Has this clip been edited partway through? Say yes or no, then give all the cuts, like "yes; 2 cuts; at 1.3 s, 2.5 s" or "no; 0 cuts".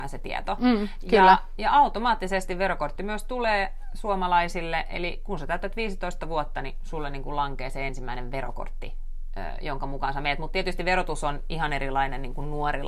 no; 0 cuts